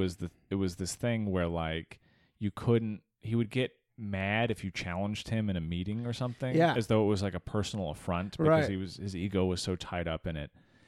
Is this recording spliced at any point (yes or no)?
no